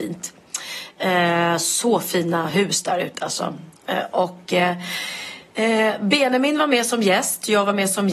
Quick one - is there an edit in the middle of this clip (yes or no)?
no